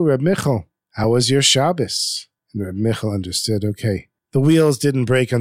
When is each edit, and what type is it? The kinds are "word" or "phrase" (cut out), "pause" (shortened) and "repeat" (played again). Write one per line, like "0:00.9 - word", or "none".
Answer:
none